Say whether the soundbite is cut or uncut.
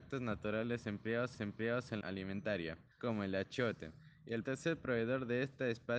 cut